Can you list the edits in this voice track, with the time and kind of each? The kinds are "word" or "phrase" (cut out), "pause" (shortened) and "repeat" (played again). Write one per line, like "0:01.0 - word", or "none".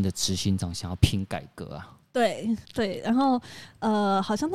0:02.6 - pause

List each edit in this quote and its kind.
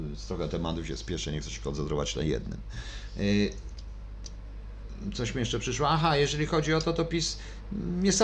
none

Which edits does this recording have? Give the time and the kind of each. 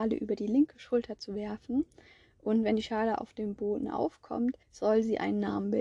0:04.6 - pause

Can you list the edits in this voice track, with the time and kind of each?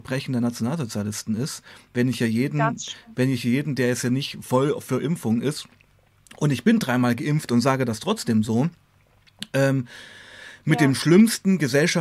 none

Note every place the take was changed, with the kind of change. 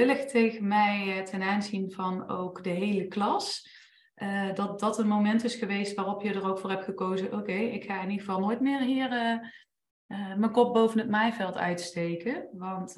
none

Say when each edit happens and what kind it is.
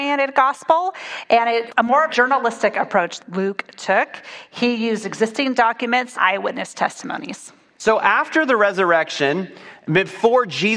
0:01.7 - word
0:02.1 - word
0:03.2 - word
0:06.1 - word

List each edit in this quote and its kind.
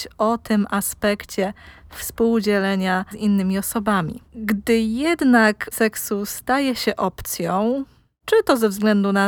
0:03.1 - word
0:04.3 - pause
0:05.7 - word

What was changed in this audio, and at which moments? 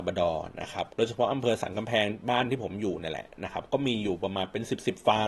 0:00.9 - pause

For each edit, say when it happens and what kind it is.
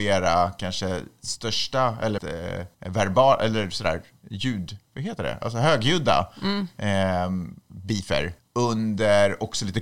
0:02.2 - word
0:02.7 - pause
0:04.8 - pause
0:08.4 - pause

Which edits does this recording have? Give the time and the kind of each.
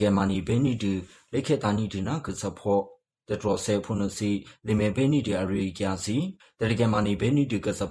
none

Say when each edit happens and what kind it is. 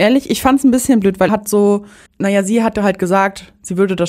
0:01.3 - word
0:02.1 - pause

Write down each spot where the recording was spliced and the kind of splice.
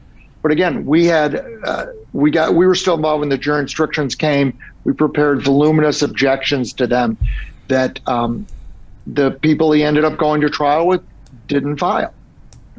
0:02.1 - pause
0:09.0 - pause

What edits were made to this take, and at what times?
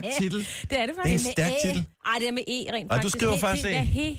0:01.9 - pause

